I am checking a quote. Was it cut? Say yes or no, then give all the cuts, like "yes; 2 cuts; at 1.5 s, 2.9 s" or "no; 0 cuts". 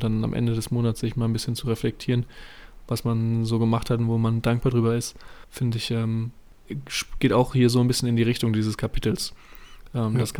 yes; 1 cut; at 5.4 s